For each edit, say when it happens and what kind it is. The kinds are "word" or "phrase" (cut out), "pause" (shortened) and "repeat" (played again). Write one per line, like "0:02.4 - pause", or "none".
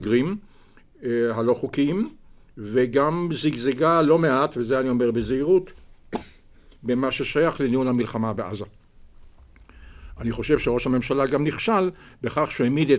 none